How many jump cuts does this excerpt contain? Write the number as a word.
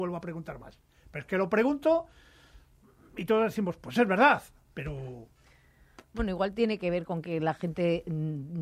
zero